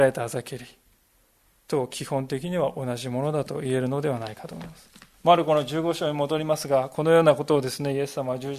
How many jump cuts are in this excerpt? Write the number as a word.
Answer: one